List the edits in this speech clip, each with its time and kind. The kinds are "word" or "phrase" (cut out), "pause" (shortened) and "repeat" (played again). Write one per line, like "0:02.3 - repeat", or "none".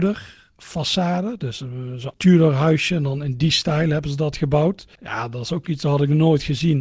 0:02.1 - word
0:05.0 - pause